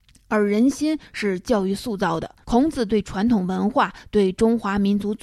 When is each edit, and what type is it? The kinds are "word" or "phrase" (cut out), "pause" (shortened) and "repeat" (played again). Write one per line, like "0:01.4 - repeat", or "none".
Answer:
0:02.4 - pause

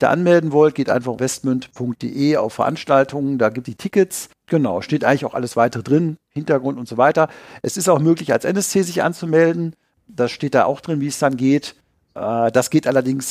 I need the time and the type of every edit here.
0:01.2 - phrase
0:03.7 - word
0:06.2 - pause

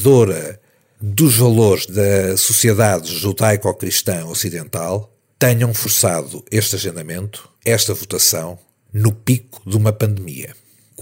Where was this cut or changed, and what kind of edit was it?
0:07.6 - pause

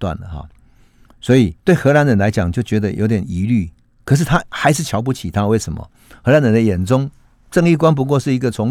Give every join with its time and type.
0:01.6 - pause

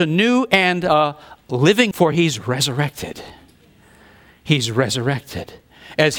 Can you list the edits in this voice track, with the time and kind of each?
0:01.9 - word

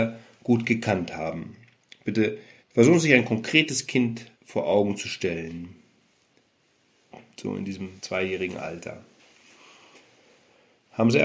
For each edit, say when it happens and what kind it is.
0:02.6 - pause
0:04.3 - pause
0:08.0 - pause

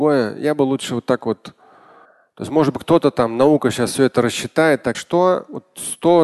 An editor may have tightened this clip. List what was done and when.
0:02.0 - pause
0:04.9 - phrase

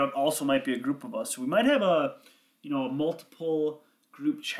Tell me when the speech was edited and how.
none

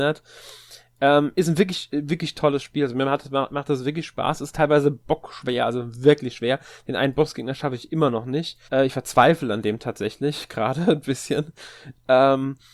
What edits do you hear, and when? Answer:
0:08.7 - pause

